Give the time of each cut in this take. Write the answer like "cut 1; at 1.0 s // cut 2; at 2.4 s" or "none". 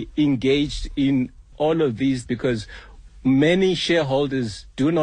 cut 1; at 1.5 s // cut 2; at 2.3 s